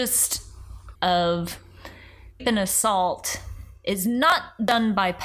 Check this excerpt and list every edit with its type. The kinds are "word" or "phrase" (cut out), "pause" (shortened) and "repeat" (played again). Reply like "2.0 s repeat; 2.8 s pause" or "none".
1.0 s word; 2.4 s phrase